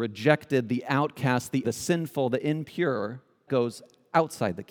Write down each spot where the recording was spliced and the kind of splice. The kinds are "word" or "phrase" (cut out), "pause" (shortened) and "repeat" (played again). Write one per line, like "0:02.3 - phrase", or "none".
0:01.6 - word
0:03.5 - word